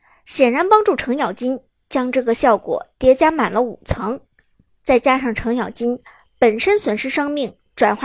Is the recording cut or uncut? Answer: uncut